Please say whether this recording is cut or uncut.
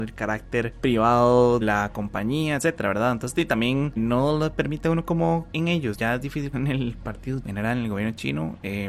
cut